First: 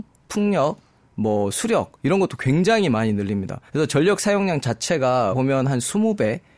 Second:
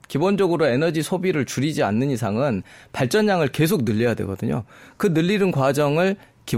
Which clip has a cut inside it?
first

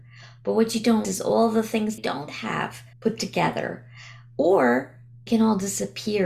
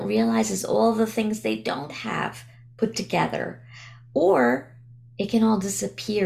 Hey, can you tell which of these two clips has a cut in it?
first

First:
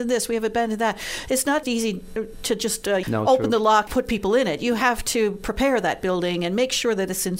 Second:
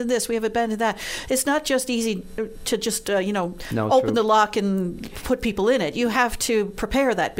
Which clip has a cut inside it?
first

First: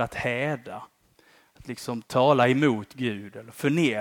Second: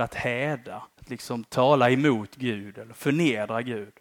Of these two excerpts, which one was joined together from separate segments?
second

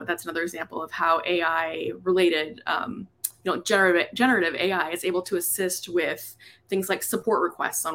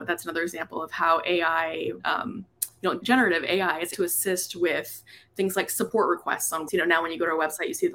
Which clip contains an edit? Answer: second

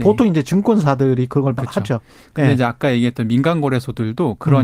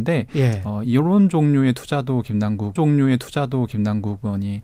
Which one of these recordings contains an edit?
second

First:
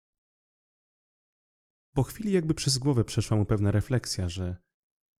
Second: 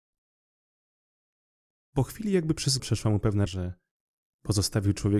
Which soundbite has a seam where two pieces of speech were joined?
second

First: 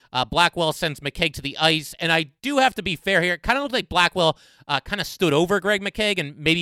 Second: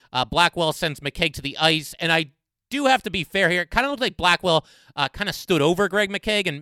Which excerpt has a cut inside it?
first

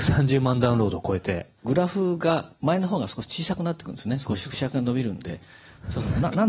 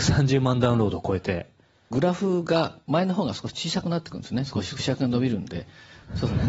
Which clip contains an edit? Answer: first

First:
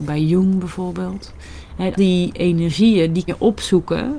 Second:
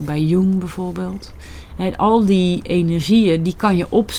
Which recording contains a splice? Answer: first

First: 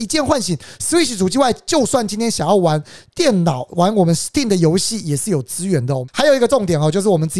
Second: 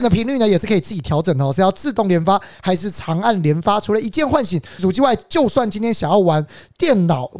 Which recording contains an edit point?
second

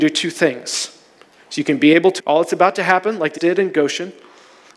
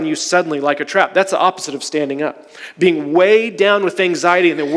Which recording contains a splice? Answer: first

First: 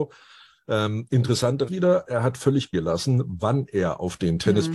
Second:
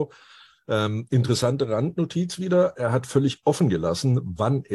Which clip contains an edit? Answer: first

